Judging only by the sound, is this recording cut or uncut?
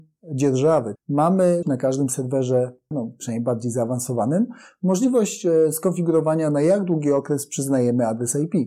cut